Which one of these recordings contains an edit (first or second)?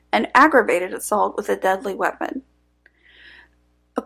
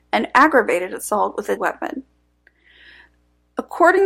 second